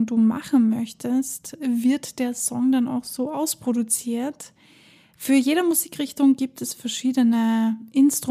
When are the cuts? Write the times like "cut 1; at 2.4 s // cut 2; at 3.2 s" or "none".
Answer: none